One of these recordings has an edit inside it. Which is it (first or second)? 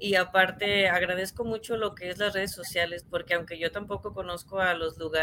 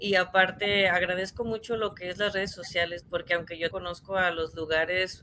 second